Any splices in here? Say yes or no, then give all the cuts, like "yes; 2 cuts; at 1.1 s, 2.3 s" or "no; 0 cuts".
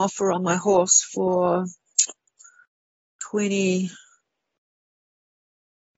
no; 0 cuts